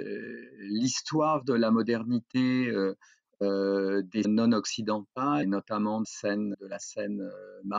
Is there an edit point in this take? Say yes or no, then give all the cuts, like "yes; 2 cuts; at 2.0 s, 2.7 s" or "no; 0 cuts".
yes; 4 cuts; at 4.2 s, 5.4 s, 6.0 s, 6.5 s